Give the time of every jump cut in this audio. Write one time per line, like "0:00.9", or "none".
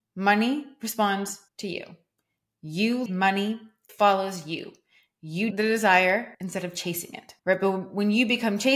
0:01.5
0:03.1
0:03.9
0:05.5
0:06.3
0:07.4